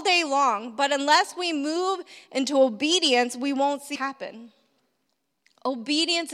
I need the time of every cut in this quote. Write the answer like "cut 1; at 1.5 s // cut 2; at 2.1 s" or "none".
cut 1; at 4.0 s